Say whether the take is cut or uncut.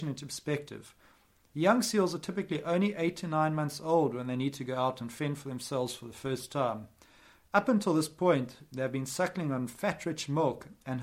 uncut